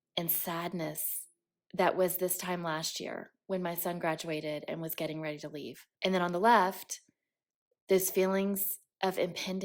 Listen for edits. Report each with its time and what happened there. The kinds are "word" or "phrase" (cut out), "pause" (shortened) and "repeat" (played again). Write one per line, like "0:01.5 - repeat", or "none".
0:05.9 - pause